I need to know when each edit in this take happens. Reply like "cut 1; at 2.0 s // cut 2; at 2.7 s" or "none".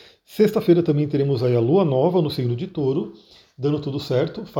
none